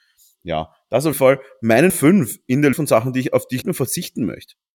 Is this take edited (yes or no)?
yes